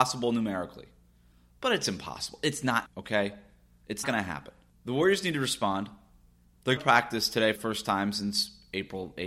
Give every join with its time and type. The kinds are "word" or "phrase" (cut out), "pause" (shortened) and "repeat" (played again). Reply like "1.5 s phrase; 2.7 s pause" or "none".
2.9 s word; 4.0 s word; 6.8 s word; 7.6 s word